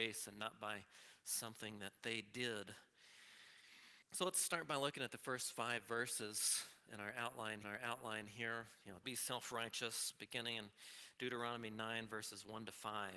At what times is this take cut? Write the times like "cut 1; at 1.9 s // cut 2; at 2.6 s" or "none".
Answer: cut 1; at 4.0 s // cut 2; at 6.9 s // cut 3; at 7.6 s // cut 4; at 9.0 s